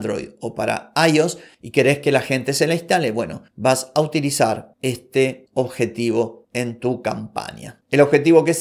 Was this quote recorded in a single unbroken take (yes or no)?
yes